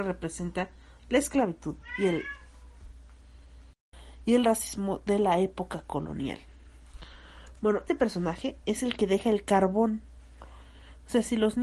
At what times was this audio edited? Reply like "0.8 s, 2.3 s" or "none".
7.9 s